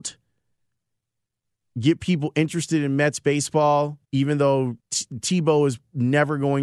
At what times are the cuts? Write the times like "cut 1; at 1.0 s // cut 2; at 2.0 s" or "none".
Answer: cut 1; at 4.0 s // cut 2; at 4.8 s